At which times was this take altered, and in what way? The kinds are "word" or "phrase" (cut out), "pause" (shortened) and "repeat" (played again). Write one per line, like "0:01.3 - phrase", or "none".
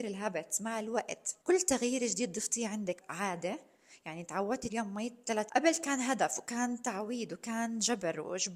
0:01.4 - pause
0:03.0 - phrase
0:04.7 - phrase
0:05.5 - word